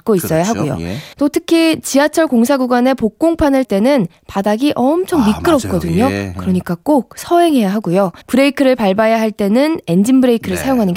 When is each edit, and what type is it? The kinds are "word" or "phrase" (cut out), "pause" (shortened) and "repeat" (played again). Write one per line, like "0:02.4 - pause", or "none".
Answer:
0:01.1 - pause
0:03.6 - word
0:08.2 - pause